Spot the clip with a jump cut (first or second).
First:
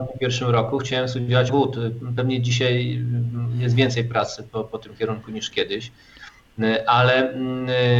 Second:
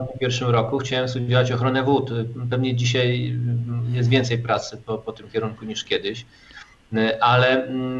first